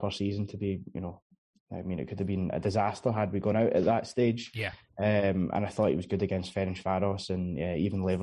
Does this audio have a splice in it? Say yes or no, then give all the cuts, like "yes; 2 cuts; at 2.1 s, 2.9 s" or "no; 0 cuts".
no; 0 cuts